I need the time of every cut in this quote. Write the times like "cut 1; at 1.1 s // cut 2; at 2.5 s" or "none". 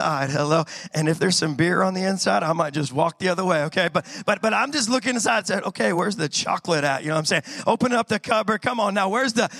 none

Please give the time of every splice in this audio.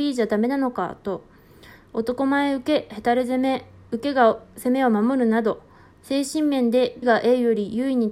cut 1; at 7.0 s

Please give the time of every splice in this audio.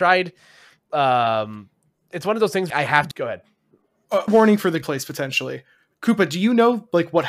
cut 1; at 2.7 s // cut 2; at 3.1 s // cut 3; at 4.3 s // cut 4; at 4.8 s

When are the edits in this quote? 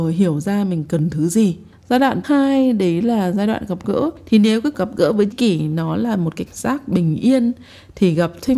cut 1; at 2.2 s // cut 2; at 4.7 s // cut 3; at 5.3 s // cut 4; at 6.5 s

